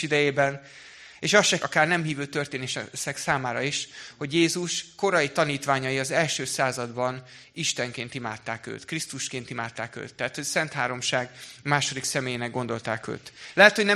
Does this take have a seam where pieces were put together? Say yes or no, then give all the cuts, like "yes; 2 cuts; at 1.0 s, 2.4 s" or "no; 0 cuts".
yes; 1 cut; at 1.6 s